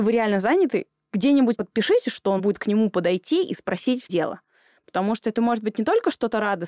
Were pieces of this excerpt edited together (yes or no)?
yes